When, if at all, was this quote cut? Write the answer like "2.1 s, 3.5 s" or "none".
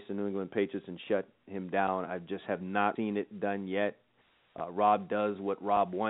3.0 s